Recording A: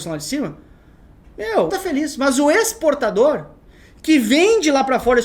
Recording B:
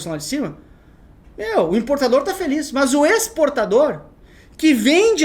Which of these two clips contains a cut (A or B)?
A